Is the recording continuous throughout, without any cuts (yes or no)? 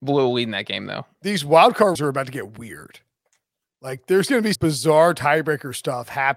no